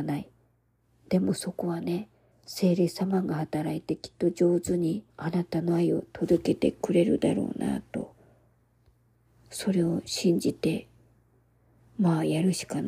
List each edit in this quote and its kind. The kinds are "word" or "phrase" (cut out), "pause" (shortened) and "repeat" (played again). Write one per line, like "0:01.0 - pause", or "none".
0:02.3 - pause
0:05.1 - pause